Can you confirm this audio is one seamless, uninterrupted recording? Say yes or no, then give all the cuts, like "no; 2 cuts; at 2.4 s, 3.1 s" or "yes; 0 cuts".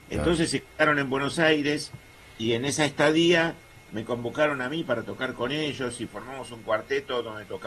yes; 0 cuts